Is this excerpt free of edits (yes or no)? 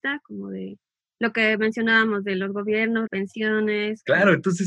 no